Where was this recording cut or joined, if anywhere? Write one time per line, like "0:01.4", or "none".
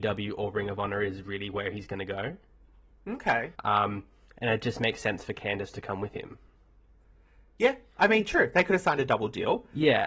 0:03.5